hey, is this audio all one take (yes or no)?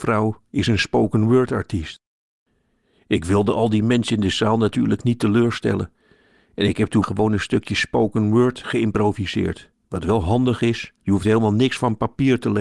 no